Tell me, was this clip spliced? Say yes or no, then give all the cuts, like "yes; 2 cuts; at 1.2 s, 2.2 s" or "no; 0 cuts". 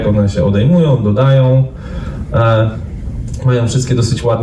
no; 0 cuts